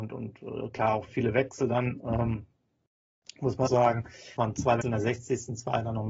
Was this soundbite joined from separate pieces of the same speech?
yes; 4 cuts; at 1.1 s, 3.7 s, 4.4 s, 4.8 s

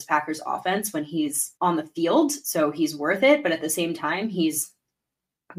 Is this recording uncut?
no; 1 cut; at 1.6 s

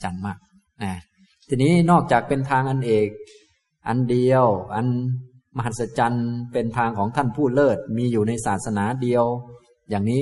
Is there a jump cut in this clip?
no; 0 cuts

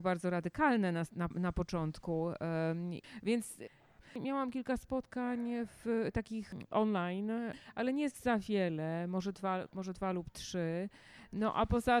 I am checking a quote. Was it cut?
yes; 2 cuts; at 1.3 s, 9.7 s

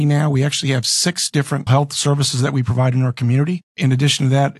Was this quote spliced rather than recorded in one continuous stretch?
yes; 1 cut; at 1.7 s

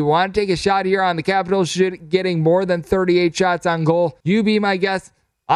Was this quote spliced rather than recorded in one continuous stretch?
yes; 1 cut; at 4.2 s

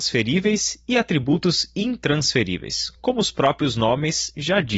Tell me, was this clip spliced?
no; 0 cuts

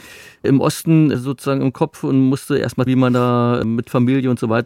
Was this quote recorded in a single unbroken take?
no; 1 cut; at 2.9 s

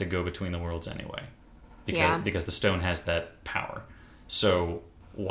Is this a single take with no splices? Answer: yes; 0 cuts

